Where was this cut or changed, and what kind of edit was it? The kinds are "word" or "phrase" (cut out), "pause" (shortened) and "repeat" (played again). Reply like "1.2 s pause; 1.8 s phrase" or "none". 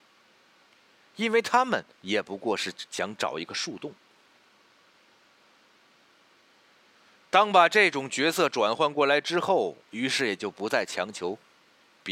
1.9 s pause; 9.8 s pause